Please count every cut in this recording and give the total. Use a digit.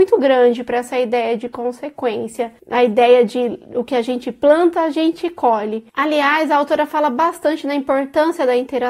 1